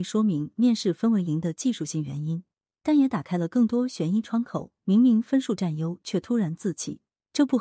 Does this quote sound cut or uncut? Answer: uncut